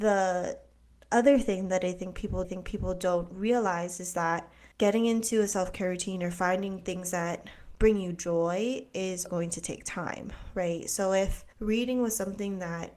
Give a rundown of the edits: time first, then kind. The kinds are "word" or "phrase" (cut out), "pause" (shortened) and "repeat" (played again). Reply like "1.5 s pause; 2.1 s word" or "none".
2.4 s repeat; 4.7 s pause; 9.3 s word; 11.5 s pause